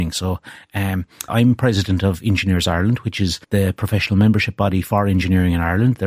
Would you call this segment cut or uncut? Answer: cut